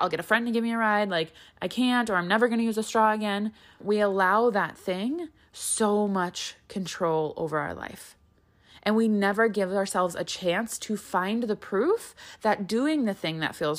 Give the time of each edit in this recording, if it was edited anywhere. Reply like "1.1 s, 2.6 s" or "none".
3.8 s